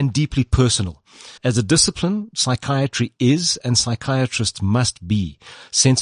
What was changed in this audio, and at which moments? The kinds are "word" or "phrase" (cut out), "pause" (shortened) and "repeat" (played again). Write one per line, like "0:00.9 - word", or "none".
0:01.4 - pause